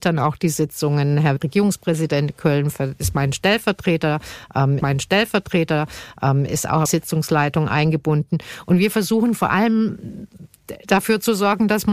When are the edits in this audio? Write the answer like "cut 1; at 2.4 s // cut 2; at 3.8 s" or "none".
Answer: cut 1; at 1.4 s // cut 2; at 4.8 s // cut 3; at 6.9 s